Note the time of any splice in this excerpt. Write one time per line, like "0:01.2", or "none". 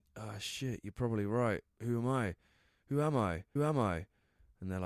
0:03.6

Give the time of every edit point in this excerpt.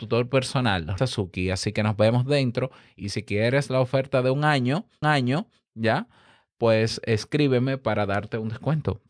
0:01.0
0:05.0

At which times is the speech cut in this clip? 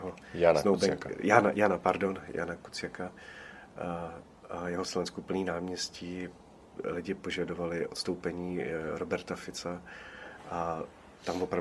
0:04.8

